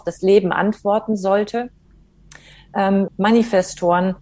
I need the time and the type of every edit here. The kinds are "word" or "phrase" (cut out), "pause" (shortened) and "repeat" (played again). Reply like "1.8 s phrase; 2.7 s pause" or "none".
3.1 s word